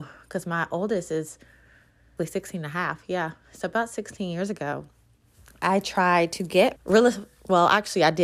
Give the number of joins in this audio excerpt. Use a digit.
2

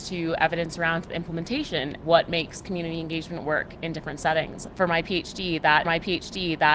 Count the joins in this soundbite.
2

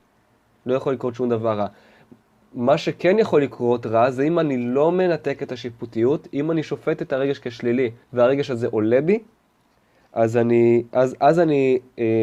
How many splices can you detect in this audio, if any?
1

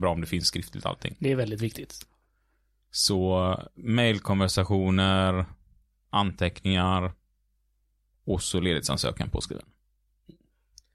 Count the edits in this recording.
1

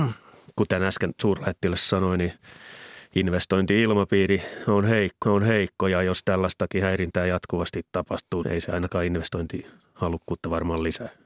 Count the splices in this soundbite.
2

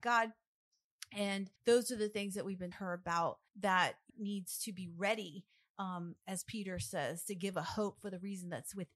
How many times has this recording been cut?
4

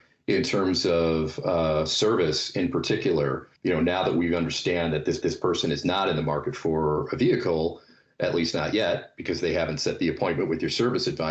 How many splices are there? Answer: 2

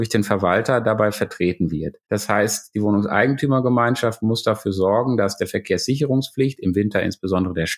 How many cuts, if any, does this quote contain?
1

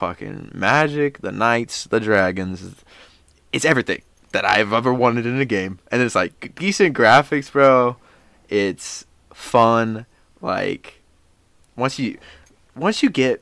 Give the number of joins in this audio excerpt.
0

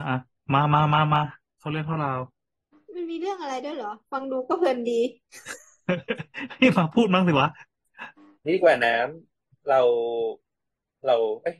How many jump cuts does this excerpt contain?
0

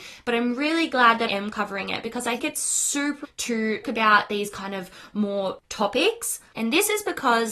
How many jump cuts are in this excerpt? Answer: 5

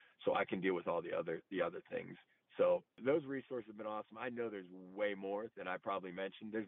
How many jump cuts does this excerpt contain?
0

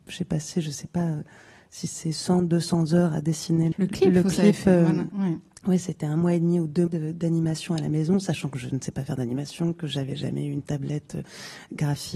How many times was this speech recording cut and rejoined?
2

